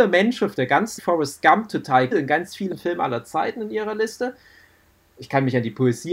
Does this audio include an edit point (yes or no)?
yes